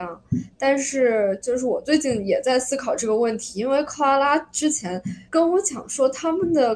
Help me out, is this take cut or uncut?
cut